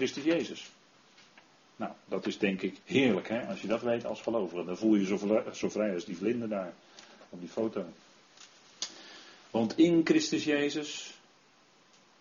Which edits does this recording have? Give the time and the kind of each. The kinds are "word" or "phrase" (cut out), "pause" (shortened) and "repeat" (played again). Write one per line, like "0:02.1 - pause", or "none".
0:02.8 - pause